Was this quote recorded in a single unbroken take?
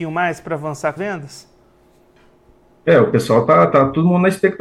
no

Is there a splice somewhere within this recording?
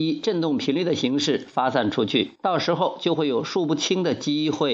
yes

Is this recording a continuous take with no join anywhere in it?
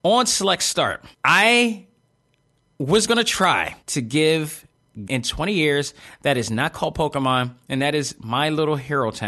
no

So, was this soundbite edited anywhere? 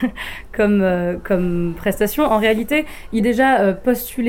yes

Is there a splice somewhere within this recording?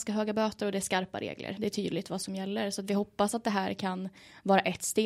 no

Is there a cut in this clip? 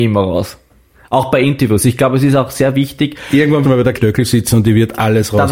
yes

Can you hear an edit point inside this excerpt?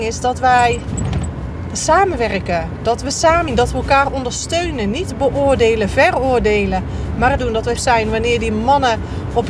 yes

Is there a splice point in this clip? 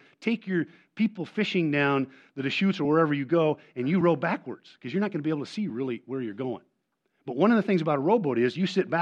no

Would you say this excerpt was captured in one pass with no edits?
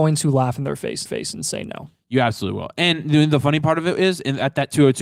no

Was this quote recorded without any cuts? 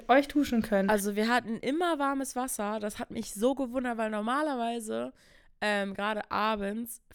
yes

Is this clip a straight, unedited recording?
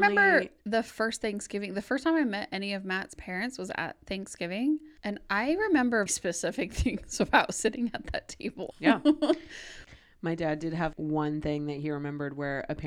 no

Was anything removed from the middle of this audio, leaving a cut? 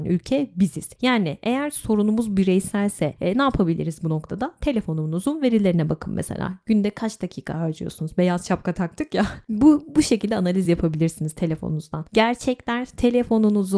no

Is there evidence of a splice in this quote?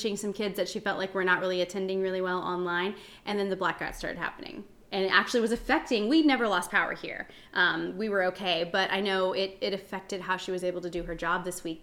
no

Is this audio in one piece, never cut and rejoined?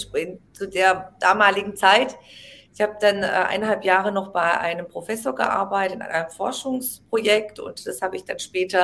yes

